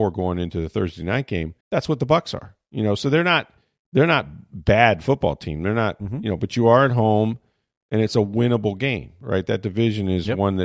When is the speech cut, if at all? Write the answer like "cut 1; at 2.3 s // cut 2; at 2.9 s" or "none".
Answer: cut 1; at 1.6 s